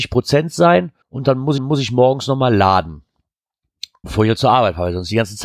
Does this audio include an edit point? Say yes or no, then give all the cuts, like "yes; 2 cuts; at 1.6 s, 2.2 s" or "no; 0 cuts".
yes; 3 cuts; at 1.0 s, 1.6 s, 4.0 s